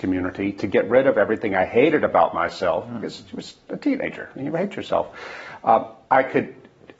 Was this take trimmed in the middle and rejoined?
no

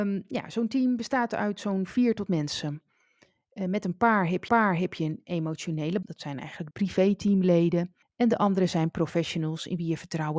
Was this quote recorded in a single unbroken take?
no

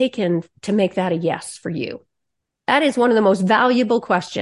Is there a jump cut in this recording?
no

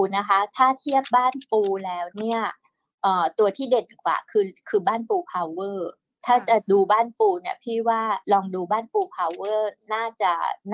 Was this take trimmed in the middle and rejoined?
yes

